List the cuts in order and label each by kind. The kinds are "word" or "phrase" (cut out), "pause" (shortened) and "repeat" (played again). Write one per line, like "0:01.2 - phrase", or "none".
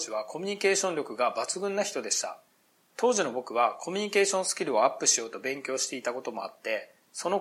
none